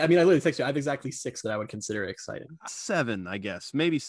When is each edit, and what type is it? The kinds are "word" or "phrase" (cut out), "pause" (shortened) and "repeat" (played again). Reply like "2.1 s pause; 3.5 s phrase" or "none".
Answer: 1.4 s word; 2.7 s word